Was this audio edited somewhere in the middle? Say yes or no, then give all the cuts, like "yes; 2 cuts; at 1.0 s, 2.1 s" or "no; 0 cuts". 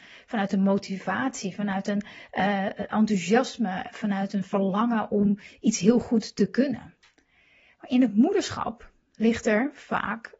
no; 0 cuts